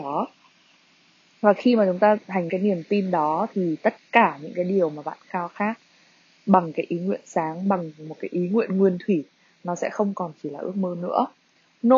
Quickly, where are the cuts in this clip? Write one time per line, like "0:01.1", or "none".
0:02.5